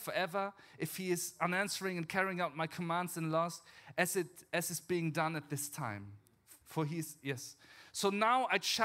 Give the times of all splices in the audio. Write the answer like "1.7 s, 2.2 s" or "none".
6.6 s